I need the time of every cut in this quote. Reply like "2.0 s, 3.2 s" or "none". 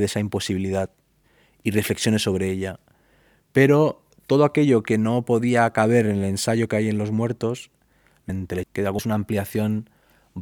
8.3 s, 8.6 s, 9.0 s